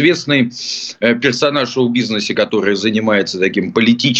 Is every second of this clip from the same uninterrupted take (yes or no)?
yes